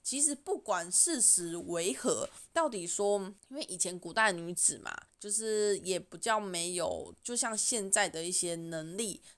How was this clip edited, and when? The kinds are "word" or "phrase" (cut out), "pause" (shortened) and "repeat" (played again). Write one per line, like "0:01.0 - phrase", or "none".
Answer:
0:03.4 - pause
0:05.1 - pause